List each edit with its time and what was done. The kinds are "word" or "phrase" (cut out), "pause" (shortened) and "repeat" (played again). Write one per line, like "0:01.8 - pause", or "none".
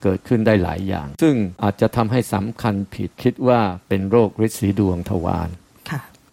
0:03.1 - pause